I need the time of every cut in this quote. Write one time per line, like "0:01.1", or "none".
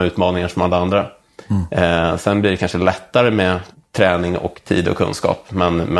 0:03.7